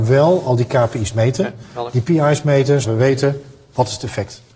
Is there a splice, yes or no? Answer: yes